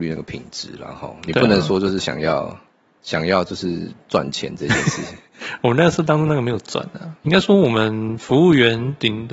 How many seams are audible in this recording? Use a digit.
2